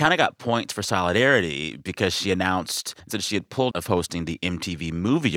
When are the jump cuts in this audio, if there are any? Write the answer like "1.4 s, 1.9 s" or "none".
3.0 s, 3.7 s

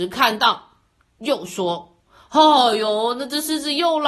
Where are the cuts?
none

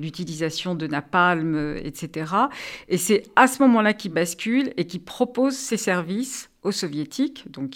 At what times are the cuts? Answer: none

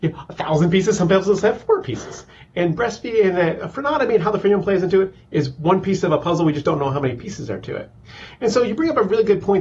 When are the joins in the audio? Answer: none

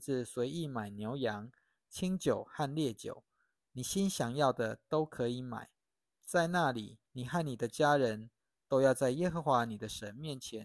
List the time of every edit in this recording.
7.1 s

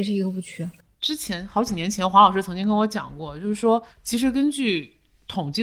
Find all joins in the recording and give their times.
3.9 s

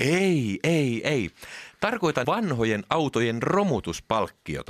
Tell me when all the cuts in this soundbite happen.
1.0 s, 2.2 s

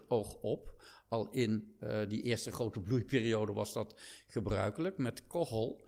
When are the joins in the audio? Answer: none

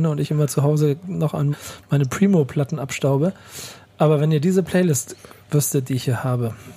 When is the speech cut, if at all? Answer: 1.5 s

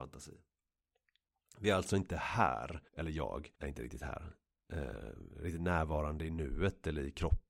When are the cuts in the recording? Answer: 2.9 s, 3.5 s

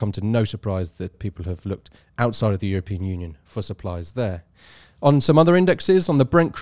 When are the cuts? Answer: 1.1 s

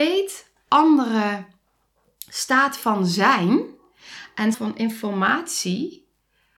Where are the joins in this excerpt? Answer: 4.5 s

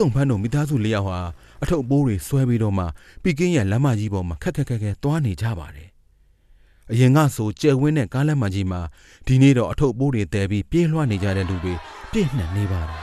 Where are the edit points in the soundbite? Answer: none

